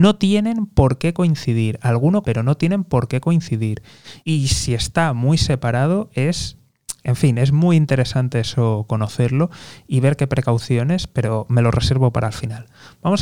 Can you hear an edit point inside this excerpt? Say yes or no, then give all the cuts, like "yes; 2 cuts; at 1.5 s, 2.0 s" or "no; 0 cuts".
yes; 2 cuts; at 2.2 s, 4.2 s